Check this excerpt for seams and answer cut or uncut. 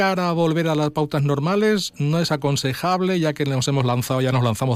uncut